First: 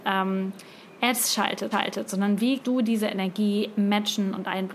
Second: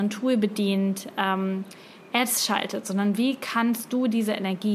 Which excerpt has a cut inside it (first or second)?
first